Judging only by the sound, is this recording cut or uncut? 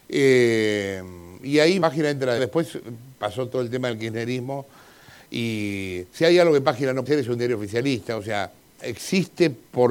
cut